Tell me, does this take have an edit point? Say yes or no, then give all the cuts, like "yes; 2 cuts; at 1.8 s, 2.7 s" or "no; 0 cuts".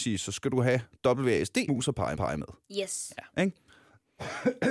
yes; 2 cuts; at 1.7 s, 2.2 s